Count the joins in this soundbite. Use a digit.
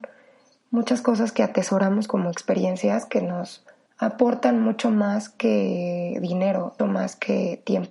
2